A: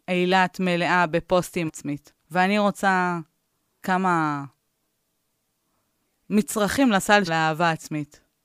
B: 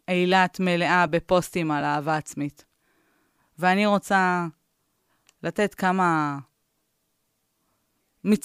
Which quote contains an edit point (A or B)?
A